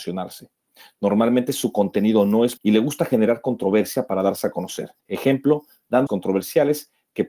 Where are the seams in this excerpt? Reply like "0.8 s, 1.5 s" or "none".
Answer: 2.6 s, 5.0 s, 6.1 s